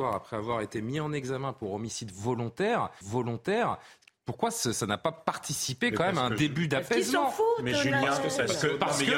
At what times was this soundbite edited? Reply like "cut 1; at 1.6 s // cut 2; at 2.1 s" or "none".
cut 1; at 3.0 s // cut 2; at 4.1 s // cut 3; at 4.7 s

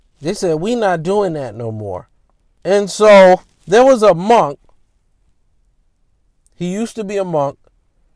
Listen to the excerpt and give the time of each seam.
none

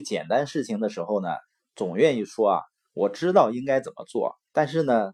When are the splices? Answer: none

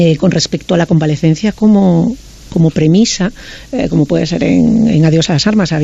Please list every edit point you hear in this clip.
none

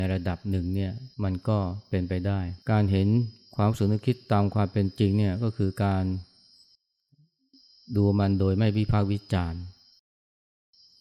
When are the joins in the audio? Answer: cut 1; at 1.1 s // cut 2; at 2.6 s

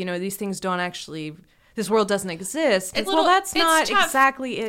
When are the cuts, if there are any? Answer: cut 1; at 3.1 s

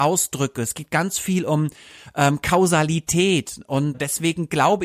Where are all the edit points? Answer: cut 1; at 3.9 s

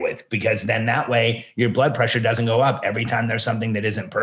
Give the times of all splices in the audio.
none

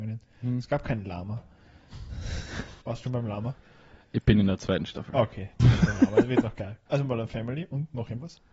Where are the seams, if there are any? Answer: cut 1; at 2.8 s // cut 2; at 5.6 s // cut 3; at 6.9 s

